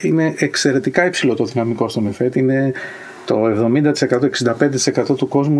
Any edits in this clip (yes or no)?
no